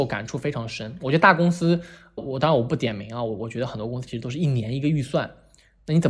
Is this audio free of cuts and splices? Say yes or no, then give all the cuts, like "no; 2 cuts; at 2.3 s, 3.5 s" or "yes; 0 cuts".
no; 1 cut; at 2.2 s